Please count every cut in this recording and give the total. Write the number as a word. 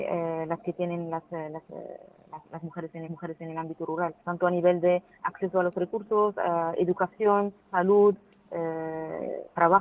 three